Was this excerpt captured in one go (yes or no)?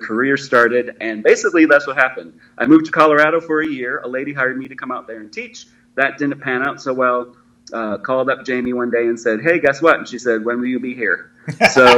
yes